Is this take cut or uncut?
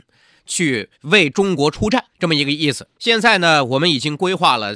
cut